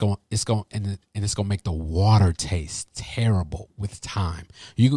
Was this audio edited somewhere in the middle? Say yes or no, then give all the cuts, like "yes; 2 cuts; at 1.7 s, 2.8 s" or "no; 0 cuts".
no; 0 cuts